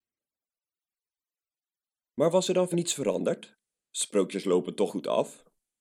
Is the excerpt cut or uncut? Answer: cut